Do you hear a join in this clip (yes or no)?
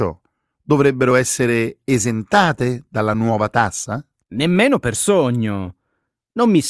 no